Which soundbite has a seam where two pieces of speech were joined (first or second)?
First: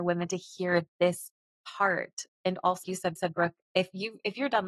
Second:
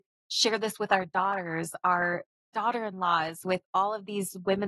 first